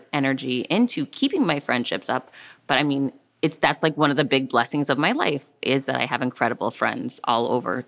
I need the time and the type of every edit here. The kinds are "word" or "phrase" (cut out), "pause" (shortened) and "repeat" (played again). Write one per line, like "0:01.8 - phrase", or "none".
none